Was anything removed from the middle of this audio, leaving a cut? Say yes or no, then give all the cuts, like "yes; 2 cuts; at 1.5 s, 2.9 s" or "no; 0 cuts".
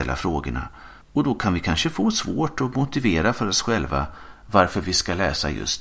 yes; 1 cut; at 1.0 s